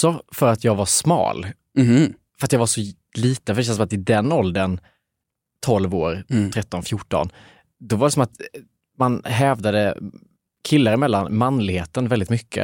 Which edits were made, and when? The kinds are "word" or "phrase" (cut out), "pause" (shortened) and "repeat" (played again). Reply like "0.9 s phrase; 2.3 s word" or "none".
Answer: none